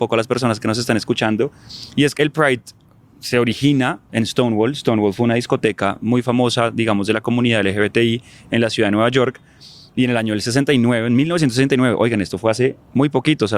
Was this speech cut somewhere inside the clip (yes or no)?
yes